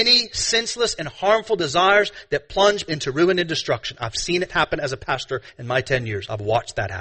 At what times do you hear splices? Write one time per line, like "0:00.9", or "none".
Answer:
0:02.9